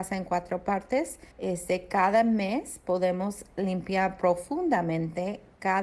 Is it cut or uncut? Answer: cut